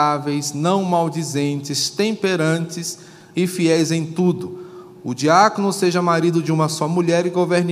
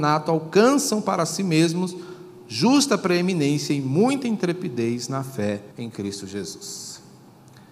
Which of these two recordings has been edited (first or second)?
second